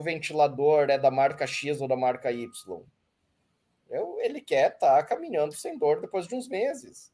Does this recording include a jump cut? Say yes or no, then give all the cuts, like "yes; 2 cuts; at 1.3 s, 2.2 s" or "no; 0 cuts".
no; 0 cuts